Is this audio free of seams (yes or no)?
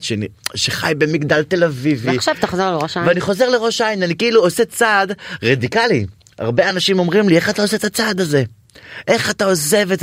yes